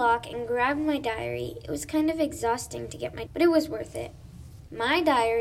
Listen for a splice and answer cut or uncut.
cut